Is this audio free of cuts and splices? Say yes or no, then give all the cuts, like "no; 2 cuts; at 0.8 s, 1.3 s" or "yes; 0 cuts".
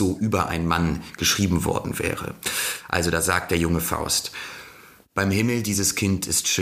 yes; 0 cuts